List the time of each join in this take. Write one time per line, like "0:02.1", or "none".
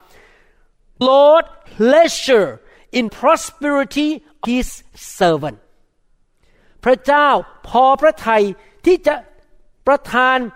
0:01.0
0:01.7
0:03.1
0:04.4

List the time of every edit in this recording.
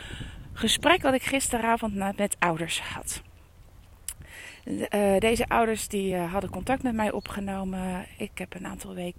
none

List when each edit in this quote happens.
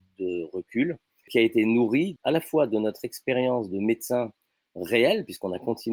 none

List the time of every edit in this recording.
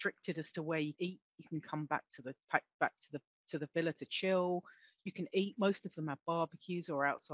0:00.9
0:02.4

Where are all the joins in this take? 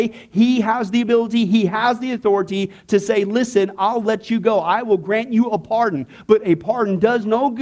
none

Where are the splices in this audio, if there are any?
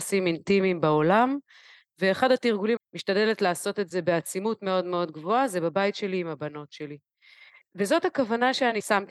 0:02.8

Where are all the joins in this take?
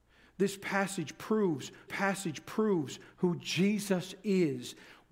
0:01.9

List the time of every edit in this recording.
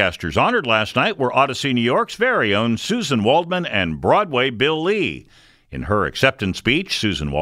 none

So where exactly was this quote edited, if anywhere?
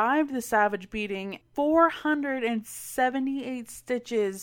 0:01.4

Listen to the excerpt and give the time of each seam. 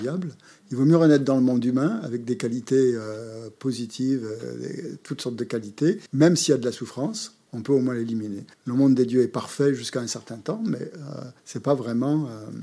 0:06.1
0:08.5
0:11.4

